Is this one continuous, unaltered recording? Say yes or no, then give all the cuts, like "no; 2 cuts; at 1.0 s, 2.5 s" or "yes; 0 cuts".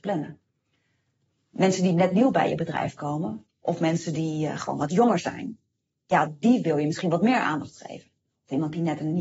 no; 1 cut; at 3.5 s